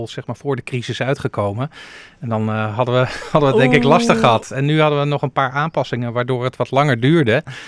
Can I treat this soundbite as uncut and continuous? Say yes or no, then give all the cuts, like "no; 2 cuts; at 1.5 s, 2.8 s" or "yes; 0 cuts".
yes; 0 cuts